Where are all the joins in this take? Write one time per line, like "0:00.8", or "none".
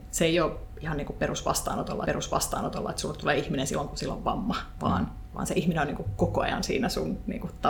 0:02.0